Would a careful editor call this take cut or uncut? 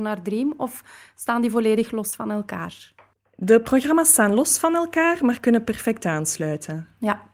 uncut